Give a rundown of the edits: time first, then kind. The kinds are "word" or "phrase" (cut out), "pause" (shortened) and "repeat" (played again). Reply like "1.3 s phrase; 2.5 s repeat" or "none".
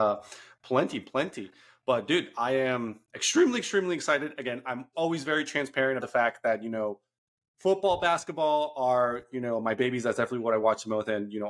4.9 s word; 6.0 s word